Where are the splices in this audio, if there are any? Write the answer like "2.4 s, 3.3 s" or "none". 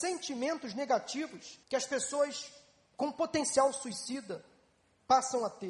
1.6 s